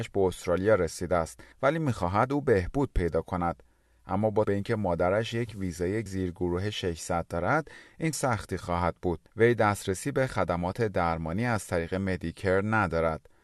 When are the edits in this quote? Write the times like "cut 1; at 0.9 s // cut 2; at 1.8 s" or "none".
cut 1; at 1.5 s // cut 2; at 4.4 s // cut 3; at 6.1 s // cut 4; at 8.1 s // cut 5; at 9.3 s